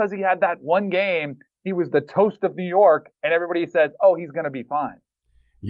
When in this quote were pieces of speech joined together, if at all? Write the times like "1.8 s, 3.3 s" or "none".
none